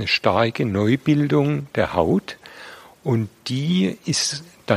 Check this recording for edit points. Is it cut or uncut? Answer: uncut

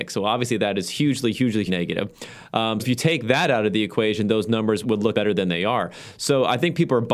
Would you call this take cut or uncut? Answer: cut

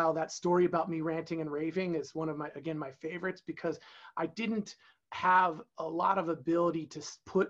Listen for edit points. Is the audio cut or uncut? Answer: uncut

